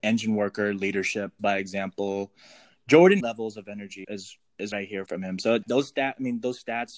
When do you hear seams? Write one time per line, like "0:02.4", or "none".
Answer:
0:01.4
0:03.2
0:04.0
0:04.7
0:05.1
0:05.6